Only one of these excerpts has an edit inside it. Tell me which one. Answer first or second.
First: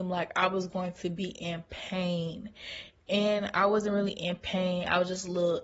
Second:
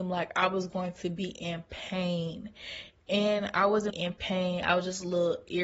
second